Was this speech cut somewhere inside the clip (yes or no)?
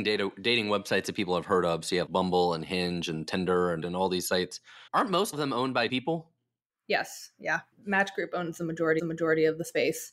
yes